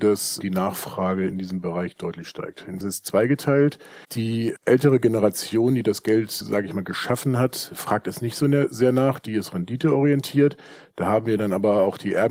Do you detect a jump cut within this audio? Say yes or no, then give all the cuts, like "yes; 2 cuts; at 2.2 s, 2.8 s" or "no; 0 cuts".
yes; 3 cuts; at 2.8 s, 4.0 s, 6.4 s